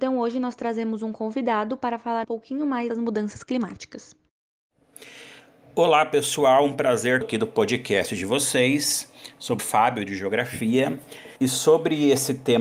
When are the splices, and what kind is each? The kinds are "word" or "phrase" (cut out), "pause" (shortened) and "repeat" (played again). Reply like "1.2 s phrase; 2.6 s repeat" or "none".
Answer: 2.2 s word; 2.9 s word; 7.2 s word; 9.6 s word; 11.4 s pause